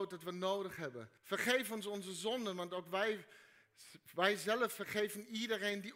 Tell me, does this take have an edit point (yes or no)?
yes